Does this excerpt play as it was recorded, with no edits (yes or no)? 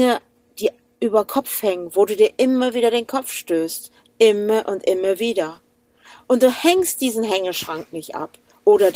yes